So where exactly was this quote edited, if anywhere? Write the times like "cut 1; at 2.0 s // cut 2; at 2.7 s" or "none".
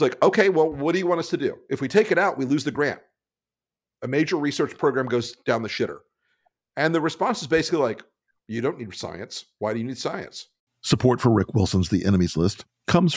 none